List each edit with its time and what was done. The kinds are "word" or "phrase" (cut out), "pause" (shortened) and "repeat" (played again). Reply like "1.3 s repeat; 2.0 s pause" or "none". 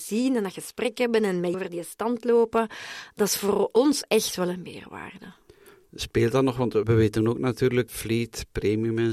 1.5 s word; 6.8 s word; 7.9 s word